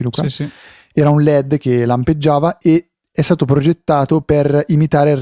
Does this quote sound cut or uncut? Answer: uncut